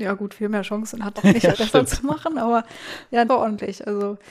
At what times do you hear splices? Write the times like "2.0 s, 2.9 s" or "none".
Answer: 1.2 s, 1.5 s, 3.3 s